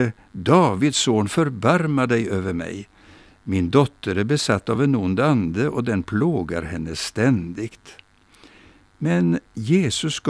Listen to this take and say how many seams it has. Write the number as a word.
zero